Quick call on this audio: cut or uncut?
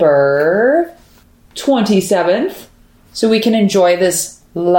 uncut